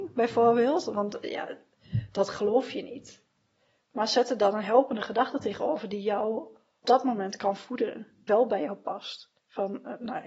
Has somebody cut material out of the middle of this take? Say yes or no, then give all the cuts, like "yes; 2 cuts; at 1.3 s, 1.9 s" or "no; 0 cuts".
yes; 2 cuts; at 6.8 s, 8.3 s